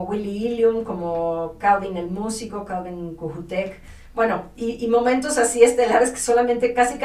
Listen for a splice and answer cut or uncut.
uncut